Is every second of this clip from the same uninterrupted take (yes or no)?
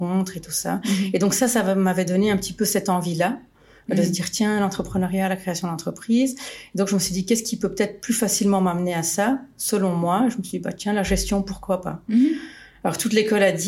yes